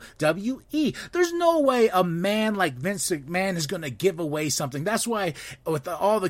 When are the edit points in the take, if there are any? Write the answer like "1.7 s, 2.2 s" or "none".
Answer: none